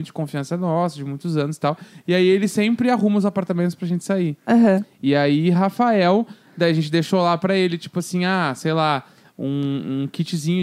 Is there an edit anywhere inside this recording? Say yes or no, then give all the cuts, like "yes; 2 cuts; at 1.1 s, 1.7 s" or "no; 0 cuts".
no; 0 cuts